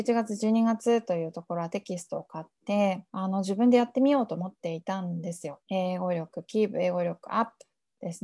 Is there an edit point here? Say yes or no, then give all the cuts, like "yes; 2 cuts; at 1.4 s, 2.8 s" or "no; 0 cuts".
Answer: yes; 2 cuts; at 3.1 s, 5.6 s